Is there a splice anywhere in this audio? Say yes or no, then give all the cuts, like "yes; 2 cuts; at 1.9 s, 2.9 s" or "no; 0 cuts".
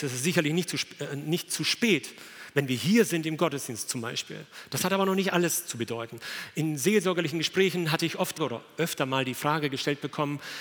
yes; 1 cut; at 8.4 s